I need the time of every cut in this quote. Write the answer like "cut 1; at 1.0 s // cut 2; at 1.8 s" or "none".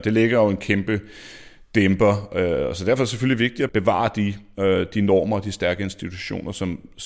none